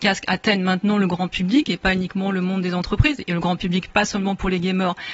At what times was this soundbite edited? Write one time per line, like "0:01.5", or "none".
none